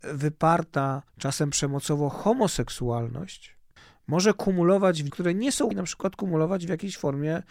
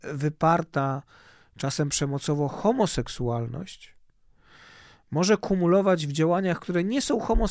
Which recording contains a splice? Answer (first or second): first